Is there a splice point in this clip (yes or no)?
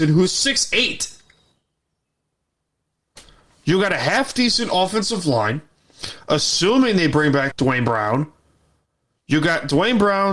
yes